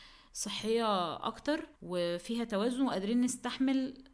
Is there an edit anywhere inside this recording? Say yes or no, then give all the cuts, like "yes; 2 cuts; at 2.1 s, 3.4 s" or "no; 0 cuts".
yes; 1 cut; at 1.7 s